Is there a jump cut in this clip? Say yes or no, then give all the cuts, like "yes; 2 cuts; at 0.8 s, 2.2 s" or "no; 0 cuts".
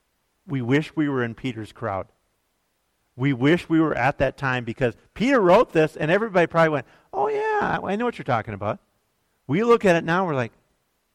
no; 0 cuts